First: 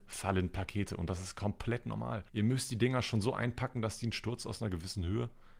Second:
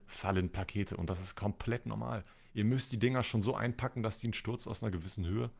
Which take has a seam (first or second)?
first